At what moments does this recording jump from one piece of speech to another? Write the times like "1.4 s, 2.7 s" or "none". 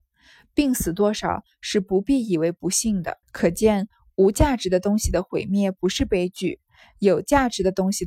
3.2 s